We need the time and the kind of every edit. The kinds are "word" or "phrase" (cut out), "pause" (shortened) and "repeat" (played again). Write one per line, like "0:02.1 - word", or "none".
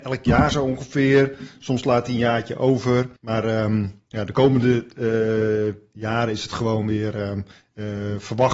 0:03.2 - pause